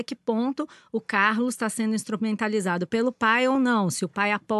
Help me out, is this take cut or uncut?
uncut